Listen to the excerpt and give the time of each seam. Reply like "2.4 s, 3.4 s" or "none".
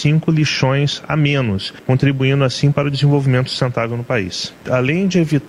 none